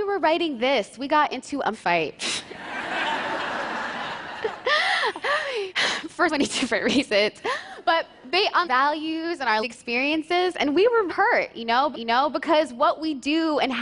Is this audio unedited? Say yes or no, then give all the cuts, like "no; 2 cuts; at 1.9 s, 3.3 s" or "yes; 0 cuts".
no; 6 cuts; at 1.7 s, 6.3 s, 8.6 s, 9.6 s, 11.1 s, 11.9 s